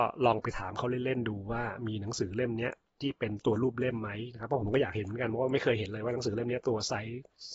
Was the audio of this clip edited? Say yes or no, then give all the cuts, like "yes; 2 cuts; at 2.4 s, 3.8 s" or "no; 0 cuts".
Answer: no; 0 cuts